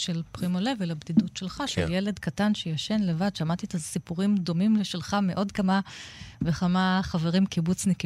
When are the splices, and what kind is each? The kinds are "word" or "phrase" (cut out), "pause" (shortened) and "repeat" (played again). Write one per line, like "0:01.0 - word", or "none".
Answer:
none